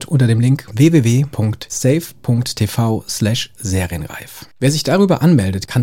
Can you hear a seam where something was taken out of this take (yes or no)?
no